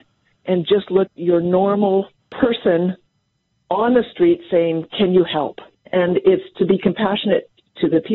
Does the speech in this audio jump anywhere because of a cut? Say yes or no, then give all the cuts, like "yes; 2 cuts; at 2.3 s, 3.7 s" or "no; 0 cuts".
yes; 3 cuts; at 1.1 s, 2.2 s, 5.7 s